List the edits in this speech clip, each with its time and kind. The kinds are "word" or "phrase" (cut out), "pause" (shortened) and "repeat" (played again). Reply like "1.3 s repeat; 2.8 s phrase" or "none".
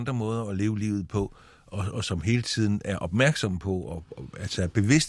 none